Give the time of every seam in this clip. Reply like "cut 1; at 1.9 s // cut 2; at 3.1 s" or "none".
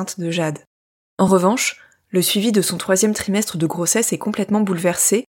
none